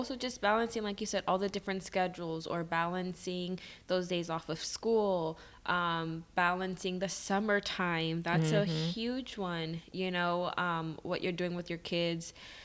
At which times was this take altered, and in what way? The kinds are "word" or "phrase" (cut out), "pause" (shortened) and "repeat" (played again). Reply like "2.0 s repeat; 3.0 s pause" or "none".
none